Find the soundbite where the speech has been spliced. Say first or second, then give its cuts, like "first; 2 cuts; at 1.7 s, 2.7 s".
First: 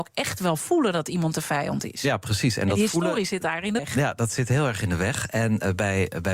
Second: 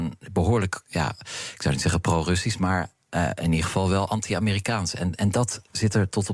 first; 1 cut; at 3.8 s